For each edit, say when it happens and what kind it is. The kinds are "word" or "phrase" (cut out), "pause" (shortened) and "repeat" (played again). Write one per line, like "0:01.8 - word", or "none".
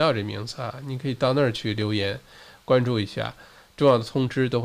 none